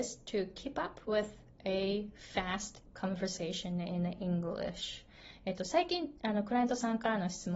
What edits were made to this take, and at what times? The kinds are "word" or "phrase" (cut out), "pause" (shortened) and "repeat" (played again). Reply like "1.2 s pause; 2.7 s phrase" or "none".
none

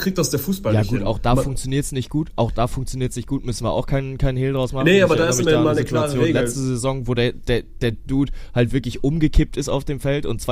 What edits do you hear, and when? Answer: none

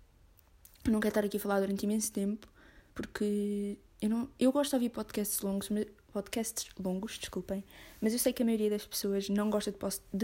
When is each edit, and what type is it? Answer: 2.9 s pause

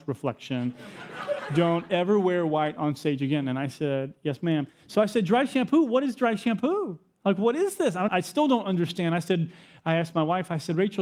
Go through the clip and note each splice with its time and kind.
8.1 s word

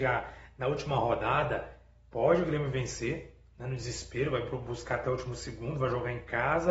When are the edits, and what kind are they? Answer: none

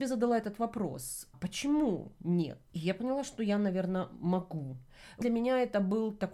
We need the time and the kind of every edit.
1.3 s word; 2.7 s pause; 5.2 s word

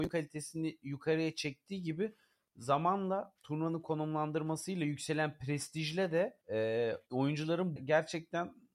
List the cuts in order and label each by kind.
3.4 s pause; 6.4 s pause; 7.8 s word

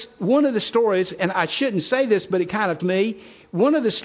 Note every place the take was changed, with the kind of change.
1.3 s word; 2.8 s word

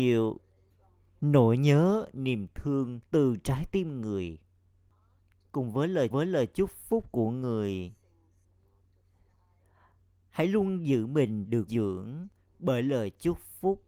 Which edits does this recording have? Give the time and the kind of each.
3.1 s pause; 6.1 s repeat; 11.7 s word

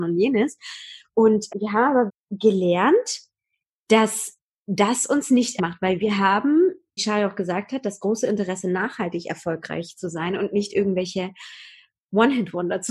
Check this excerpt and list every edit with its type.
1.5 s word; 2.1 s word; 5.6 s word; 7.0 s word

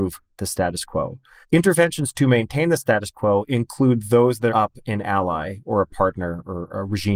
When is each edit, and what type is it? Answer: 1.4 s pause; 4.5 s phrase

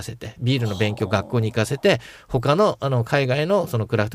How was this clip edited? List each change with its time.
none

